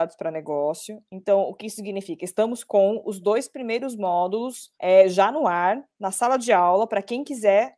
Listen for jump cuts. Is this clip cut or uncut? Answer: cut